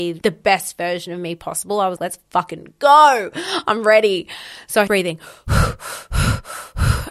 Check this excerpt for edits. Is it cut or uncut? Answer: cut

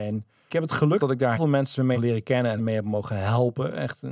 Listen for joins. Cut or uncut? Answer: cut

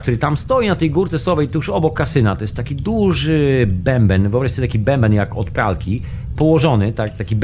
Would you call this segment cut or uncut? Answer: uncut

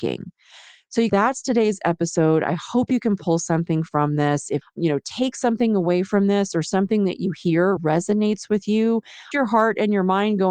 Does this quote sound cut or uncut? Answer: cut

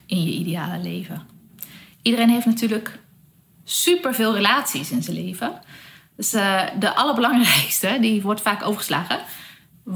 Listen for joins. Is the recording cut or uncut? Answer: uncut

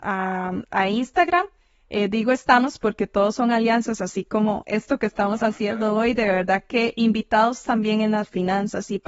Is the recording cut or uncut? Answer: uncut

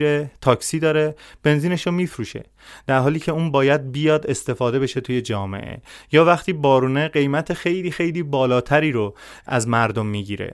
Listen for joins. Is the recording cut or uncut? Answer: uncut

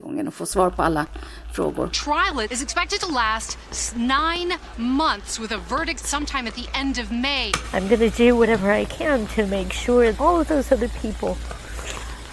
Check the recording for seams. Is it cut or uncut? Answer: cut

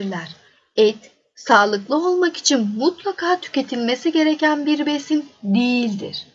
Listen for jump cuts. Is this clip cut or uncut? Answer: uncut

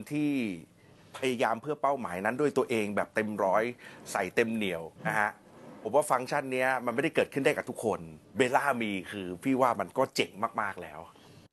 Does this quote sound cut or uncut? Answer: cut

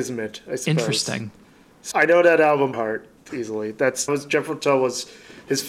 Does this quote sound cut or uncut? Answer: cut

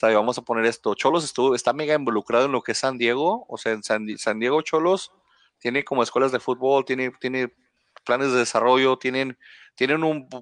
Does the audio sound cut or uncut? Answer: uncut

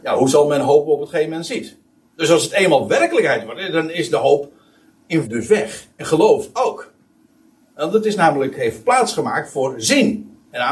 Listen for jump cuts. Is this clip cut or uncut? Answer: cut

